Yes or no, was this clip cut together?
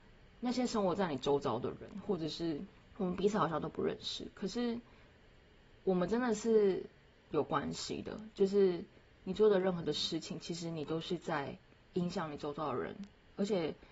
yes